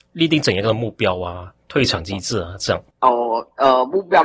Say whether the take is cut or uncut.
cut